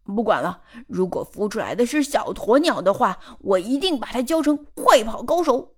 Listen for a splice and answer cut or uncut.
uncut